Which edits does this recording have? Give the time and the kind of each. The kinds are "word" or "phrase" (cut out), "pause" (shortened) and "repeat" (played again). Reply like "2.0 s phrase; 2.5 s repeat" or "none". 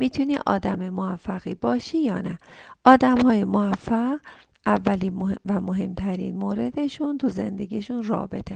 none